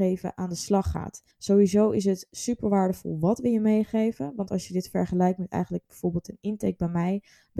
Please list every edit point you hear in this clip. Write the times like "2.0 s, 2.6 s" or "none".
1.3 s